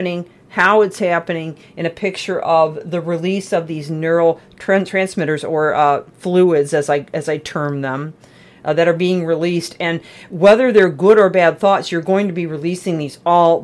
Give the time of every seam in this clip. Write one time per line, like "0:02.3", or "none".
none